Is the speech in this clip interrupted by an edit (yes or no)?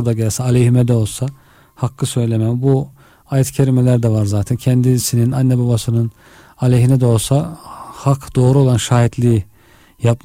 no